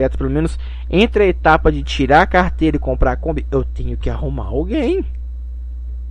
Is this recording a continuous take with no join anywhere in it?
yes; 0 cuts

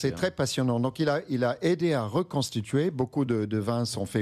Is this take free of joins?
yes; 0 cuts

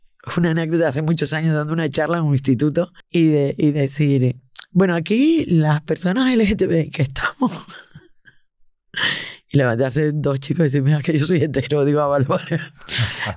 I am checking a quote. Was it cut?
no; 0 cuts

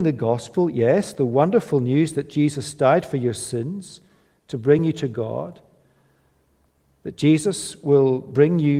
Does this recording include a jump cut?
no; 0 cuts

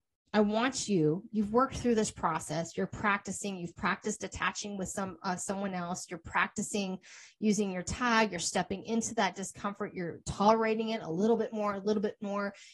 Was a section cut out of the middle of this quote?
no; 0 cuts

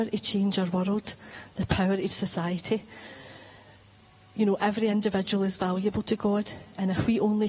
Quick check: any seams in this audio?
yes; 1 cut; at 2.1 s

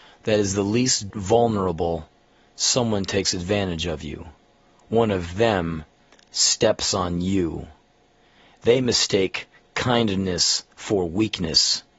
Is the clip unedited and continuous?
no; 1 cut; at 1.1 s

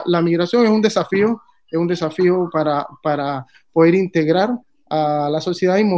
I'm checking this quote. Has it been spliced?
no; 0 cuts

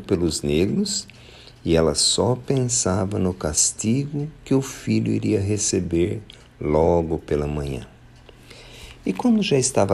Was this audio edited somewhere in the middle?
no; 0 cuts

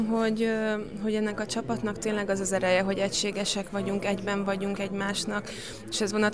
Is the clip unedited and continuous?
no; 1 cut; at 4.8 s

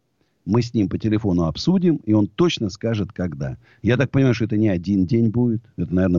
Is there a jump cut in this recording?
no; 0 cuts

